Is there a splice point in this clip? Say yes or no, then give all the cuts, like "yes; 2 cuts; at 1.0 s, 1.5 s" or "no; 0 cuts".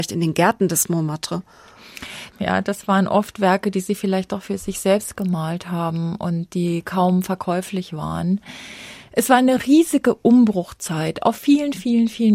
no; 0 cuts